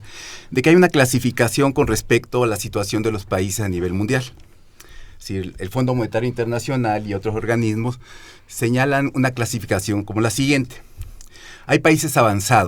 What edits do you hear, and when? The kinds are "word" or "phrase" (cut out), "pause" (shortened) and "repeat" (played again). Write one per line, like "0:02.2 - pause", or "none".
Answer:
none